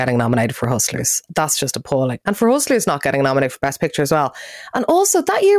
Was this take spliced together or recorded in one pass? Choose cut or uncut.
cut